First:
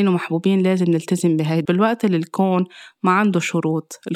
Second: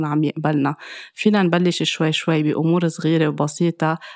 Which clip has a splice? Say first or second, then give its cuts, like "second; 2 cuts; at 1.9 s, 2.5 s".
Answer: first; 1 cut; at 1.6 s